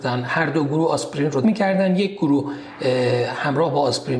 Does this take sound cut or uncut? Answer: cut